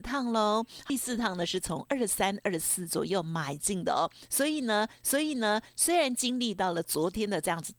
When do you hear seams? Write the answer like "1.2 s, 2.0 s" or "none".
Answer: 5.0 s